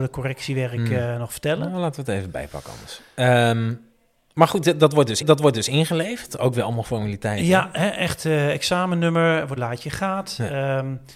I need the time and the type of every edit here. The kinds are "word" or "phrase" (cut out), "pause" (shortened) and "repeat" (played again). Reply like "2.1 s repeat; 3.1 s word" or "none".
5.2 s repeat; 9.6 s phrase

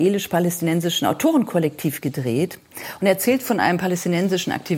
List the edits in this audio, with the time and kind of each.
none

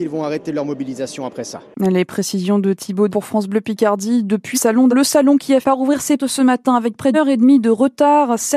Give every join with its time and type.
3.1 s word; 4.5 s word; 4.9 s word; 5.6 s word; 6.2 s word; 7.1 s word

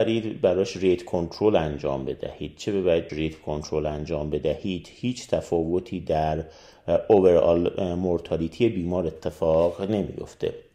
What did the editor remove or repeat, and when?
3.1 s word

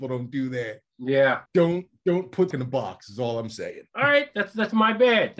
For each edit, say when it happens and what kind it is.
1.5 s pause; 2.5 s word

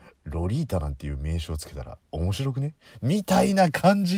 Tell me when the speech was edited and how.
2.0 s pause

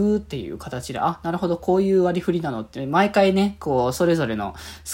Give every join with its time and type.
none

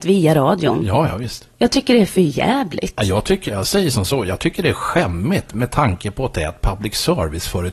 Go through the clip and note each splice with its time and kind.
1.5 s pause; 3.5 s word

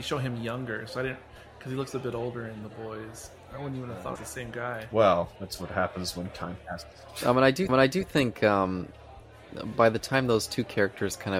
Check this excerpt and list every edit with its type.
4.1 s phrase; 7.7 s repeat

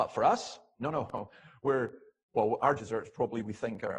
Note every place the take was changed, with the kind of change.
2.8 s word

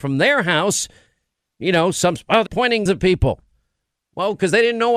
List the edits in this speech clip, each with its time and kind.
1.5 s word; 2.5 s word; 2.9 s word

